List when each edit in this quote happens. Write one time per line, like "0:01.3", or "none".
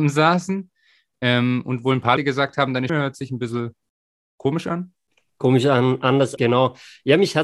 0:02.2
0:02.9
0:06.4